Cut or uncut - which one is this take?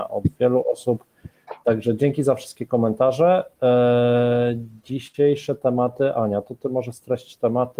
uncut